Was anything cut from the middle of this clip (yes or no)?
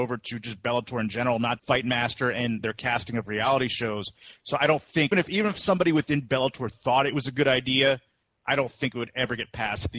yes